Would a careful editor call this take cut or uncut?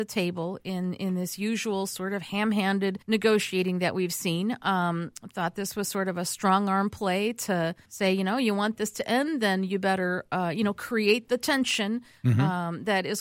cut